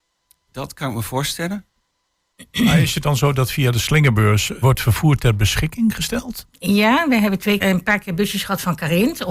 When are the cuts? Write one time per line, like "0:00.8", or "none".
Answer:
0:04.6
0:07.6